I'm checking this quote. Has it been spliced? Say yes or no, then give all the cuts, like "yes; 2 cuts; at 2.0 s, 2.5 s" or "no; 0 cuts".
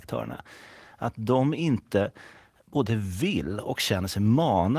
no; 0 cuts